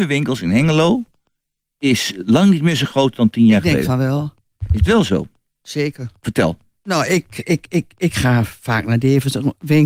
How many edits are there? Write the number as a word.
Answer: zero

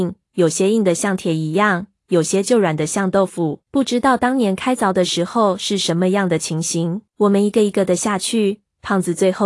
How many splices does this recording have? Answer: two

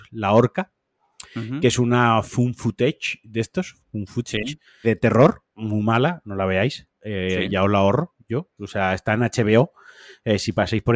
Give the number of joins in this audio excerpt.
two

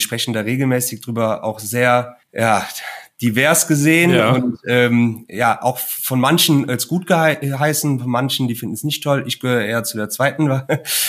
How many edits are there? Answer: one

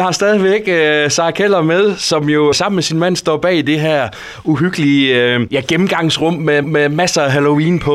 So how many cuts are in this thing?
two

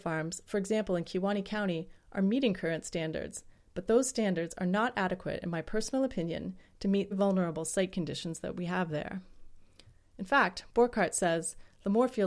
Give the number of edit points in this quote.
one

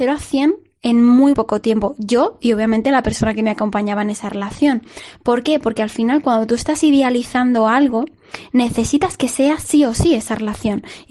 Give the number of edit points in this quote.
one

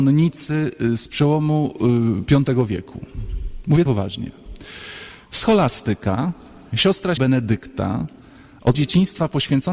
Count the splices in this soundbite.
four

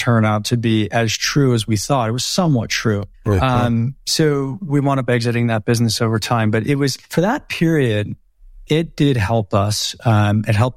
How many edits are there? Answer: three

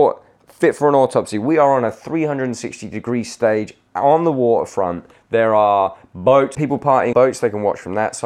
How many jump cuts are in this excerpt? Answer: two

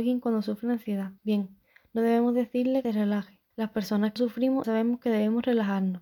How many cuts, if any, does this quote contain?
five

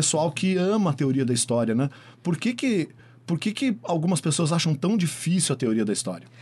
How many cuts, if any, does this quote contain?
zero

